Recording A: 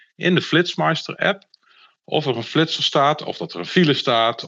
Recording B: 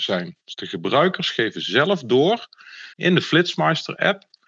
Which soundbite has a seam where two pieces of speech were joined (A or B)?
B